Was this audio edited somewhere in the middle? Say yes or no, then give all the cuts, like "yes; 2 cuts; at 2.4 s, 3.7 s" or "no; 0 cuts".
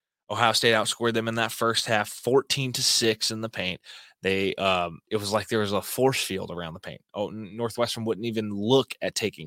yes; 1 cut; at 5.0 s